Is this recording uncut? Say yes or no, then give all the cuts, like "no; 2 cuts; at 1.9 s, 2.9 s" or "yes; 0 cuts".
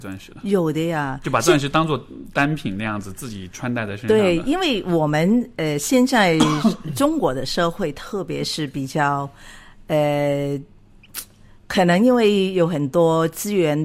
yes; 0 cuts